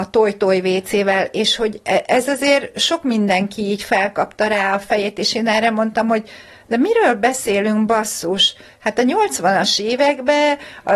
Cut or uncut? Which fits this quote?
uncut